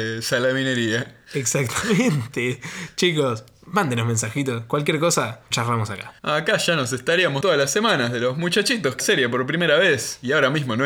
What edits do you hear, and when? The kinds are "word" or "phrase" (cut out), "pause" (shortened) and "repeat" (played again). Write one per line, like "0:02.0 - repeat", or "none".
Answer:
0:01.2 - pause
0:05.5 - word
0:06.2 - pause
0:07.4 - phrase
0:09.0 - phrase